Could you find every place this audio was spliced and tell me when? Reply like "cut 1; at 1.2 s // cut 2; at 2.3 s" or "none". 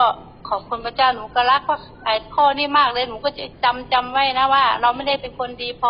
cut 1; at 3.5 s